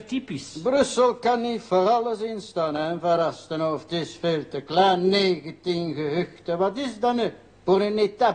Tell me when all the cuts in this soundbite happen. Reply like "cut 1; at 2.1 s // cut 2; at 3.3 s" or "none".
none